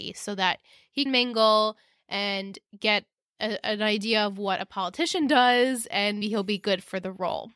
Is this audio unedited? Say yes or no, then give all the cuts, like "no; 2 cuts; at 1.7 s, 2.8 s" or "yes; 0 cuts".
no; 2 cuts; at 1.1 s, 6.2 s